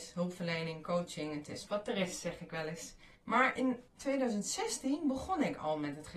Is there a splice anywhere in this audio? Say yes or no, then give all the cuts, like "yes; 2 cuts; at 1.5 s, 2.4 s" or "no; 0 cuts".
yes; 3 cuts; at 1.7 s, 3.2 s, 3.9 s